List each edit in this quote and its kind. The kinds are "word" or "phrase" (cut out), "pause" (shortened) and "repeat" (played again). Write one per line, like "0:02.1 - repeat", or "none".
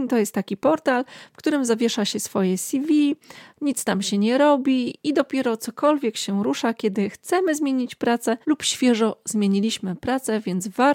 0:08.4 - pause

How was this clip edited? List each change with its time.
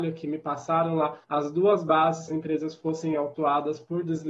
0:01.2 - pause
0:02.3 - phrase

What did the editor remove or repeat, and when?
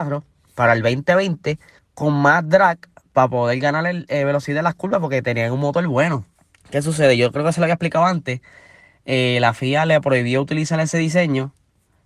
0:01.8 - pause
0:06.4 - pause

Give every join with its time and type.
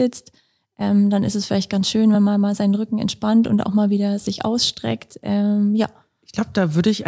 none

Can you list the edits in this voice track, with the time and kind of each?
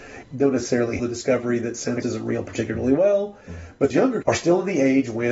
0:01.0 - word
0:02.0 - word
0:03.9 - word
0:04.2 - word

